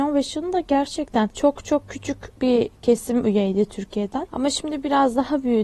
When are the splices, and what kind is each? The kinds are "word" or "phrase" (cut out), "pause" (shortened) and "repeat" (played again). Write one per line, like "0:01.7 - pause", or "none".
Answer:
none